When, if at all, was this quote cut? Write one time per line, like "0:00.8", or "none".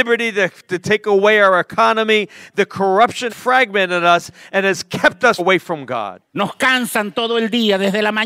0:03.3
0:05.4
0:06.3